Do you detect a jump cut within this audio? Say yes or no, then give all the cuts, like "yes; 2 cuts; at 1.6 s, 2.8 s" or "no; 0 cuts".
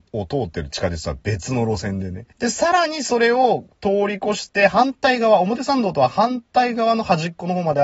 yes; 1 cut; at 2.3 s